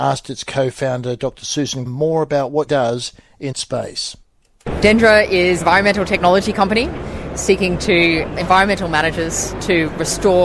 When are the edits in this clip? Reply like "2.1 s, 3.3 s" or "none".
1.9 s, 2.7 s, 3.5 s, 5.6 s, 7.3 s, 8.4 s